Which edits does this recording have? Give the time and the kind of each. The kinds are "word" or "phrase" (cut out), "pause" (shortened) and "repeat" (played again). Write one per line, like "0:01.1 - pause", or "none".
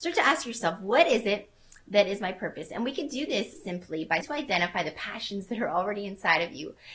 0:03.5 - word
0:04.2 - word

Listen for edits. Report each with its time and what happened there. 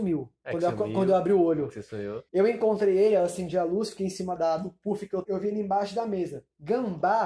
0:02.3 - pause
0:04.4 - word
0:05.2 - word

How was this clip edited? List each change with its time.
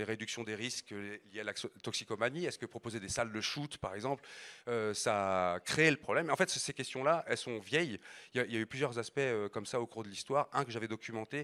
none

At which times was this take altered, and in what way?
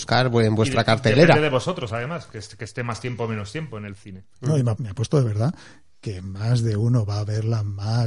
0:04.8 - word

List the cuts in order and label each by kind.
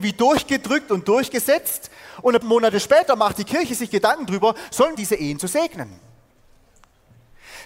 0:02.4 - word
0:05.0 - phrase

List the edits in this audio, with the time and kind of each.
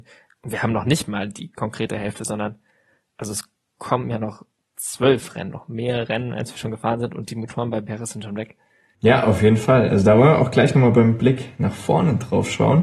0:05.5 - word

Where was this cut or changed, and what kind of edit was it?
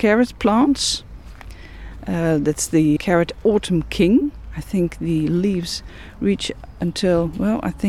0:03.0 - word

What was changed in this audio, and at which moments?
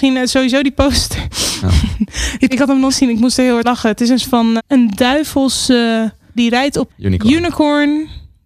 0:02.5 - word
0:02.9 - word
0:03.6 - word
0:04.2 - word
0:04.6 - word
0:06.4 - word
0:06.9 - word

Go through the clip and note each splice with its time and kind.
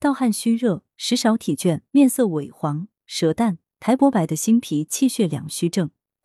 0:01.9 - pause

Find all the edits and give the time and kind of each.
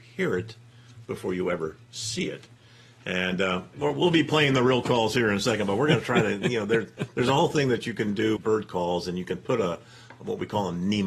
0:08.4 - word

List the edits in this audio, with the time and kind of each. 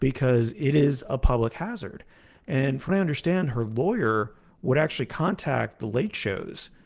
0:02.9 - word

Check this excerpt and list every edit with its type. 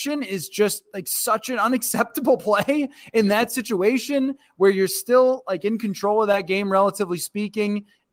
none

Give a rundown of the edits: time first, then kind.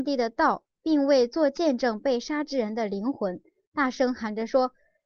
none

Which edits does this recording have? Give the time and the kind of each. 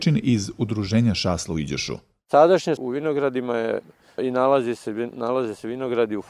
0:02.8 - word
0:04.2 - word

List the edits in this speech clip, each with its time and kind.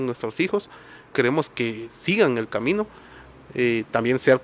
0:01.1 - word
0:01.5 - word

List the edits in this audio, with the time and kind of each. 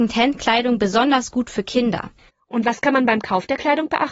none

